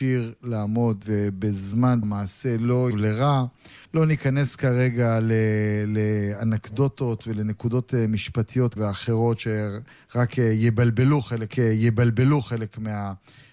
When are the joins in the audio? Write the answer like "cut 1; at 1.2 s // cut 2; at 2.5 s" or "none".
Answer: cut 1; at 1.0 s // cut 2; at 2.0 s // cut 3; at 2.9 s // cut 4; at 3.8 s // cut 5; at 8.8 s // cut 6; at 11.5 s